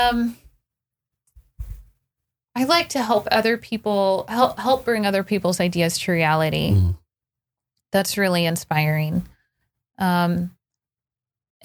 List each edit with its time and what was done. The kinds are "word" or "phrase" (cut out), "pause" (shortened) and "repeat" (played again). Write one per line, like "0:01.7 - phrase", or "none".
none